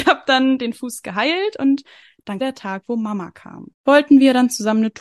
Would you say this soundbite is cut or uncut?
cut